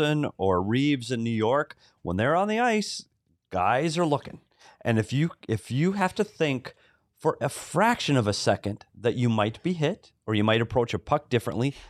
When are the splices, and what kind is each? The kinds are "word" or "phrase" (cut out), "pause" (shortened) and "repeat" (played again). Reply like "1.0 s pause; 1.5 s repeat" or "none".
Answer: none